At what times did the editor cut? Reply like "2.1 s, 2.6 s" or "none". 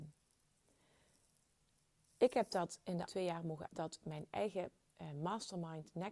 3.1 s, 3.7 s